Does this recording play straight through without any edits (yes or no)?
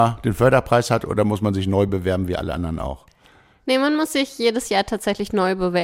yes